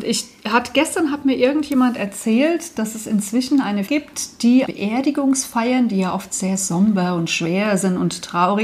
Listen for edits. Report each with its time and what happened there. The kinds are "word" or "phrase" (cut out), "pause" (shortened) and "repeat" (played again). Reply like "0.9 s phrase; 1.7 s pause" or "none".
3.9 s word; 4.6 s word